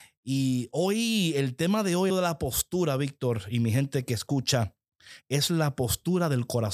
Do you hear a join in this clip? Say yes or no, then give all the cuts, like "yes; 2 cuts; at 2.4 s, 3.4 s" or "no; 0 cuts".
yes; 1 cut; at 2.1 s